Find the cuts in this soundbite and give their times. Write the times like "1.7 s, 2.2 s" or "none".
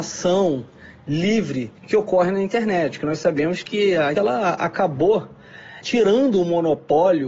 1.8 s, 4.1 s, 5.8 s